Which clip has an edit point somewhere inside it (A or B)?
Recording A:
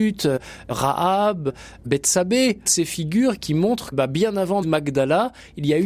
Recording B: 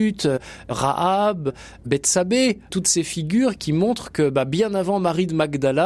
A